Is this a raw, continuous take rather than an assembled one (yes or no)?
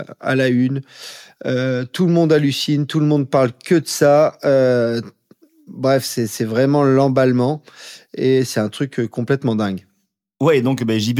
yes